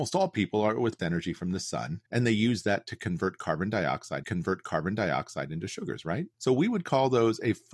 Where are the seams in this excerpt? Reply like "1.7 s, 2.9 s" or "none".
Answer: 1.0 s, 2.1 s, 4.2 s, 6.3 s